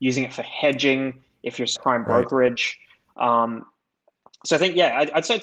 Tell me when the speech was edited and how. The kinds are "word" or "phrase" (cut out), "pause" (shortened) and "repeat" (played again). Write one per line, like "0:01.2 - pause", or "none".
0:01.8 - word

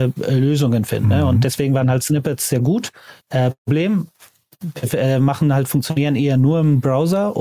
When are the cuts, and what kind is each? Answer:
0:03.2 - pause

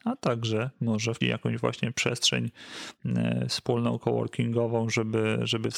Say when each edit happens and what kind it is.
0:01.2 - word

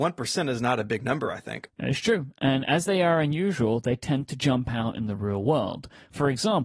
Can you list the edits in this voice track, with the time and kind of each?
none

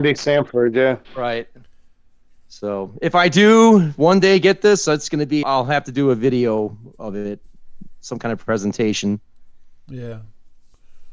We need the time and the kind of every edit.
0:01.0 - pause
0:05.4 - word

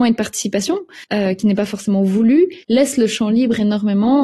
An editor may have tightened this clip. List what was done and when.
0:01.0 - pause
0:02.6 - pause

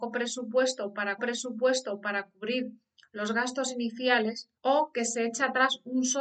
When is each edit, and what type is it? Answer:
0:01.2 - repeat
0:04.6 - pause

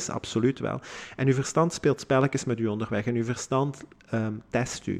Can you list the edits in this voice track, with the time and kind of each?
none

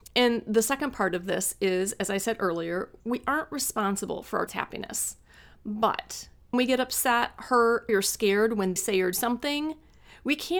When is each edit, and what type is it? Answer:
0:04.5 - word
0:06.5 - word
0:07.9 - word
0:08.8 - word
0:09.1 - word

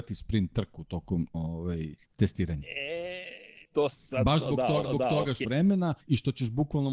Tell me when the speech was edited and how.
0:01.3 - word
0:02.0 - pause
0:03.6 - word
0:04.8 - repeat
0:05.4 - phrase
0:06.0 - pause

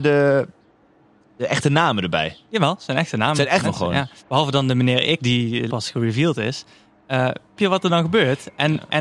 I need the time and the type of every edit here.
0:03.6 - phrase
0:04.2 - pause
0:05.2 - word
0:05.7 - word
0:07.6 - word

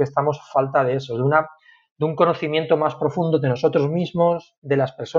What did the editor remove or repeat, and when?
none

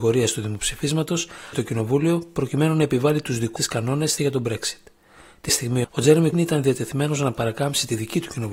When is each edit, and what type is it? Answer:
0:01.5 - word
0:03.6 - word
0:04.2 - word
0:05.5 - word
0:05.8 - word
0:06.3 - word

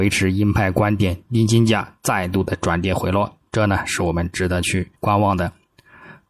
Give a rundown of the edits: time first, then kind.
0:05.0 - pause

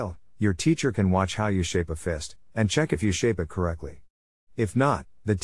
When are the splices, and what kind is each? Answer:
none

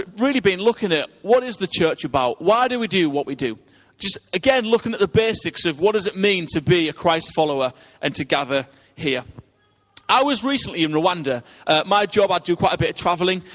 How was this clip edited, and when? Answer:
none

